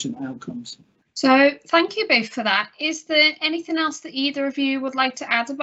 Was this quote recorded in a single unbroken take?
yes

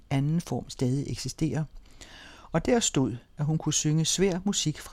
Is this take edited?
no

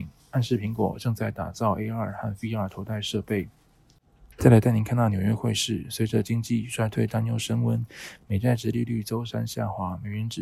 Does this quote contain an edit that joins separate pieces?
yes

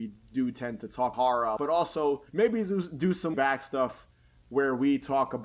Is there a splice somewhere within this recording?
yes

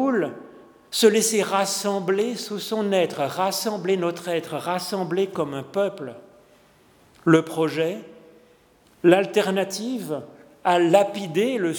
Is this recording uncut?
yes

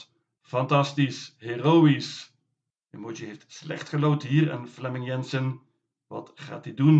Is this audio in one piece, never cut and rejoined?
yes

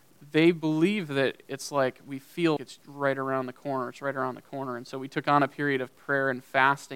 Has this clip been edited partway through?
yes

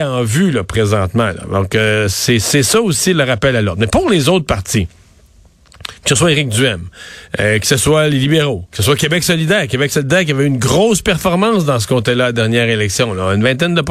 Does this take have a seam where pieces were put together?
yes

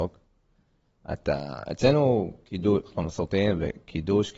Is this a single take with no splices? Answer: yes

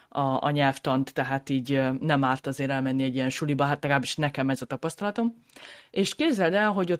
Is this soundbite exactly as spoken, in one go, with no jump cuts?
yes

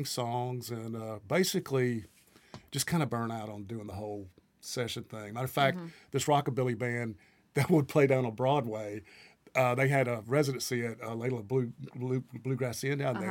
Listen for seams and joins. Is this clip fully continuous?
yes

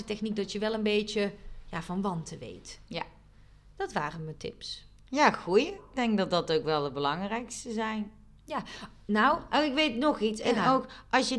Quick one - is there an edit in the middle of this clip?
no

